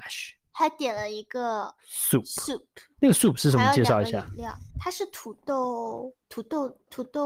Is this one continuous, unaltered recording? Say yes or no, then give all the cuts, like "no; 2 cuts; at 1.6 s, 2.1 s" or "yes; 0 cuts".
no; 3 cuts; at 1.8 s, 4.7 s, 6.2 s